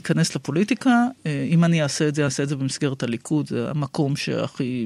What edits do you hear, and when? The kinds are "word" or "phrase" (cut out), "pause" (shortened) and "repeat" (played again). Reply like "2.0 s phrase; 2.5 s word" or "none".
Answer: 2.3 s word